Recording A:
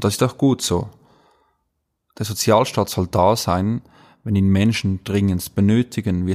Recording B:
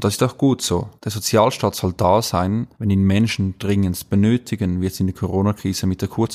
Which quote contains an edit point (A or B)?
B